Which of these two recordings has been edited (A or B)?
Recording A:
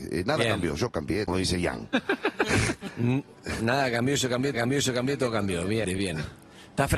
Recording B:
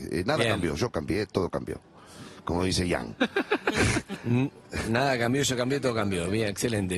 A